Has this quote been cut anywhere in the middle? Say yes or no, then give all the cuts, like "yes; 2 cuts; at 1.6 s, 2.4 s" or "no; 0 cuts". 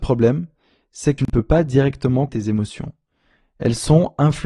yes; 2 cuts; at 1.2 s, 2.3 s